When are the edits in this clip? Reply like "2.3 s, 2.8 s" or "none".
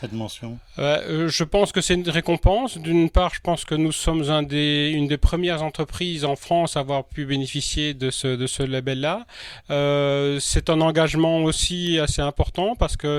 none